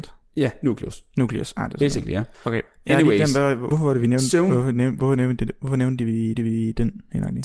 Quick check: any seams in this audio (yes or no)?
yes